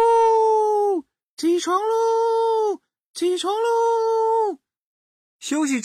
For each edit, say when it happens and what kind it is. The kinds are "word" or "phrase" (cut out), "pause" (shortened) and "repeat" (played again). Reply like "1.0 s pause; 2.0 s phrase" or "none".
none